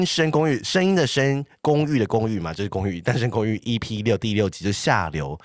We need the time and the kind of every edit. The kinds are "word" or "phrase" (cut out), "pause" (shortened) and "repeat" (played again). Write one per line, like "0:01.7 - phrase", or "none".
0:01.5 - pause